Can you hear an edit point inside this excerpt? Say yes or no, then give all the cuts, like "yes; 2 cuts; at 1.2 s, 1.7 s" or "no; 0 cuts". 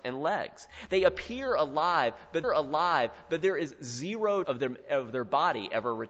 yes; 2 cuts; at 2.4 s, 4.4 s